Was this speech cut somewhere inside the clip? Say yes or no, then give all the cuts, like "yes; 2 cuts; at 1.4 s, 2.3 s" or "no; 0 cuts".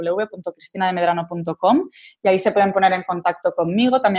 no; 0 cuts